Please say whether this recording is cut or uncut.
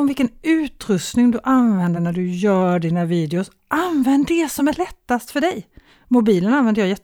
uncut